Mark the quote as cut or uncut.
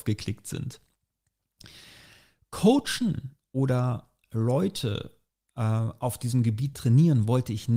uncut